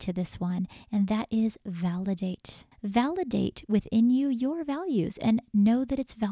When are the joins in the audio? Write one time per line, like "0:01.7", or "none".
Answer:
0:02.7